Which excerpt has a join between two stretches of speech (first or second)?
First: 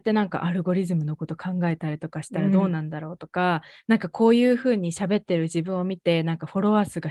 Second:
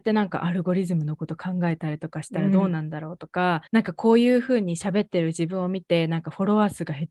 second